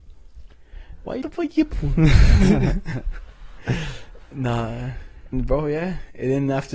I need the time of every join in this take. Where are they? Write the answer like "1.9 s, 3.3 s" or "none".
1.2 s, 1.7 s, 5.3 s